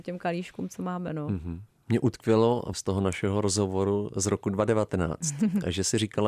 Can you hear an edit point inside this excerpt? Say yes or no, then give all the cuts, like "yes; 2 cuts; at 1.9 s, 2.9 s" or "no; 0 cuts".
yes; 1 cut; at 2.7 s